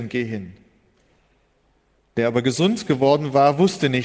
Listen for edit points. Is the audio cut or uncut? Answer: uncut